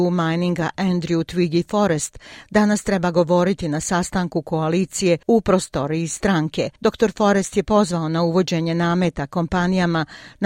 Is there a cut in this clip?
yes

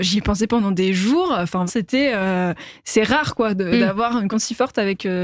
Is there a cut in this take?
yes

